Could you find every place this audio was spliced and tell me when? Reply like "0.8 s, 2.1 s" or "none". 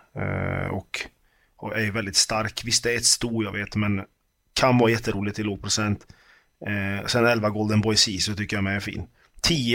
4.4 s